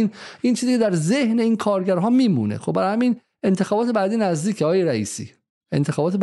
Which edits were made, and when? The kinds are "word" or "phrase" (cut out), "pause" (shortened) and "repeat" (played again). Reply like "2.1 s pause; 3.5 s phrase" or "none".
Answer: none